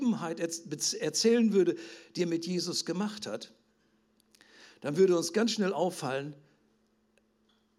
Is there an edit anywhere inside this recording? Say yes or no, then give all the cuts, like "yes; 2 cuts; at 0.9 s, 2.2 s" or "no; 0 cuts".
no; 0 cuts